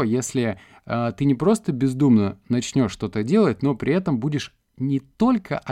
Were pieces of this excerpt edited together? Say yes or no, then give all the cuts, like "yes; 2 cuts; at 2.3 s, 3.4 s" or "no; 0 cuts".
no; 0 cuts